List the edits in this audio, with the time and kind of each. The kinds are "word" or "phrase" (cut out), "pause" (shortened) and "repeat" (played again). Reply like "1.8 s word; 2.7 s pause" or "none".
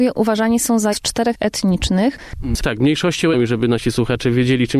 0.9 s word; 1.3 s word; 3.3 s word